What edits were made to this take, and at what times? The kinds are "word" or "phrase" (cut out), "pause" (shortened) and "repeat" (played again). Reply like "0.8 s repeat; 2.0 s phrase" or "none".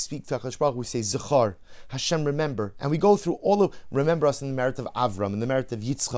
none